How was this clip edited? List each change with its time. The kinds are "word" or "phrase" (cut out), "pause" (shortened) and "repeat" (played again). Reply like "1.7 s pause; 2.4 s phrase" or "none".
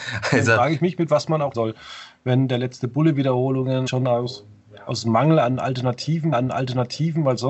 1.5 s phrase; 3.9 s word; 6.3 s repeat